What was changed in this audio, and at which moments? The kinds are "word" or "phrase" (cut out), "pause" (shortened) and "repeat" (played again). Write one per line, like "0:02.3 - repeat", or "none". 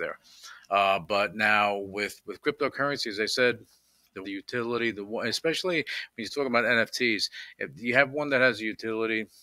0:04.2 - phrase